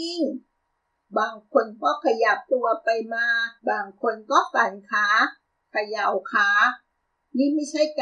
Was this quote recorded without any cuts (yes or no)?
no